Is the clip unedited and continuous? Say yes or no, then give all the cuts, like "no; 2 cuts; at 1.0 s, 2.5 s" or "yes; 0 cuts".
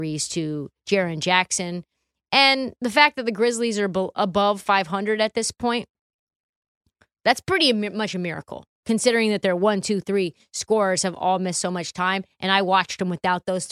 yes; 0 cuts